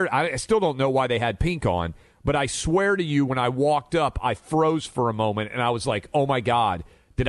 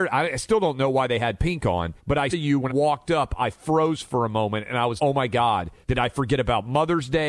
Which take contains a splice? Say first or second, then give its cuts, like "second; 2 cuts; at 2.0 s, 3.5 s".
second; 5 cuts; at 2.0 s, 2.3 s, 2.7 s, 5.0 s, 5.8 s